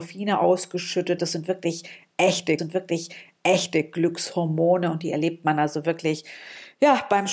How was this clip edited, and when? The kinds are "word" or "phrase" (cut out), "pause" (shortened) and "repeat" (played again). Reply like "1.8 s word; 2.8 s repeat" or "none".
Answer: 1.2 s word; 2.6 s repeat

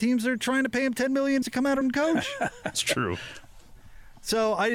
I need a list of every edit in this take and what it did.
1.4 s word; 1.8 s word; 2.7 s word

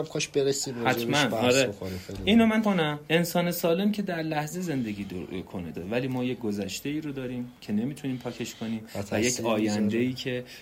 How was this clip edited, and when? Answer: 2.6 s word; 3.1 s pause; 3.9 s word; 5.7 s word

